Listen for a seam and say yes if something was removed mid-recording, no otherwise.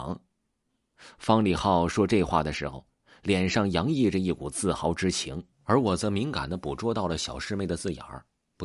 yes